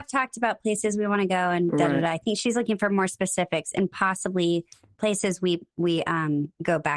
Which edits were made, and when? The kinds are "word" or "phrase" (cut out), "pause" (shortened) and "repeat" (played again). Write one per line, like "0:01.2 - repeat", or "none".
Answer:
none